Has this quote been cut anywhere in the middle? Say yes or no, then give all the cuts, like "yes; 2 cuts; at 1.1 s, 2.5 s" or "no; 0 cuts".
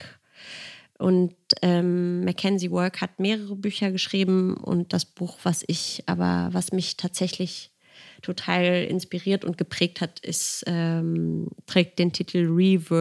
no; 0 cuts